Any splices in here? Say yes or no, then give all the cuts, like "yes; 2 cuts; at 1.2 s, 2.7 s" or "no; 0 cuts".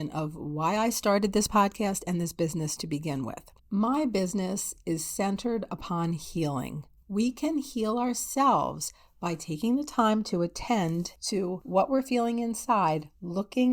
yes; 2 cuts; at 3.6 s, 7.0 s